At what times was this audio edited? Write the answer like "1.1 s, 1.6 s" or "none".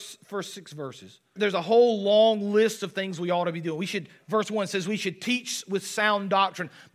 1.4 s